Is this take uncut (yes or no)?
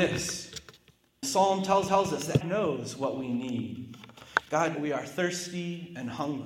no